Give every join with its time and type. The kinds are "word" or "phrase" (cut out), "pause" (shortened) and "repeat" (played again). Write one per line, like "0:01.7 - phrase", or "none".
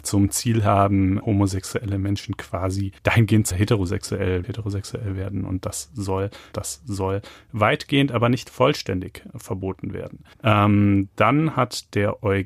0:01.2 - word
0:03.0 - pause
0:03.5 - phrase
0:04.4 - phrase
0:06.5 - repeat
0:10.3 - pause